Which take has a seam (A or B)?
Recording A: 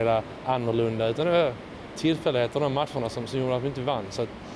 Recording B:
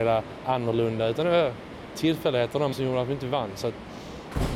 B